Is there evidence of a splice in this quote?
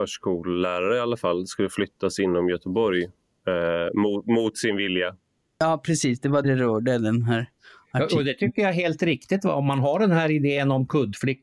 yes; 1 cut; at 6.4 s

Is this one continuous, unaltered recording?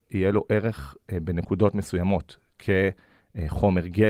yes; 0 cuts

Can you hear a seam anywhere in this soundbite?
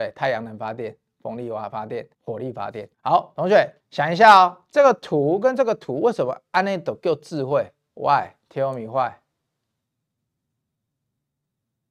yes; 3 cuts; at 2.1 s, 2.9 s, 3.8 s

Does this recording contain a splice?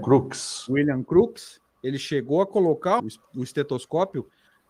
yes; 1 cut; at 3.0 s

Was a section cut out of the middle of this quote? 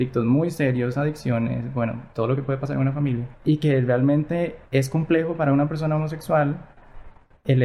yes; 1 cut; at 4.7 s

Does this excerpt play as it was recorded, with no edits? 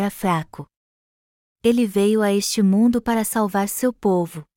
yes; 0 cuts

